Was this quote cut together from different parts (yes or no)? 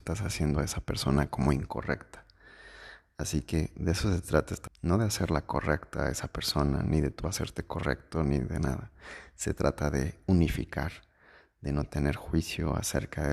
yes